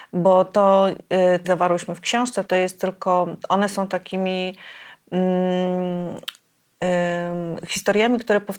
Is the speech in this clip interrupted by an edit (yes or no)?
yes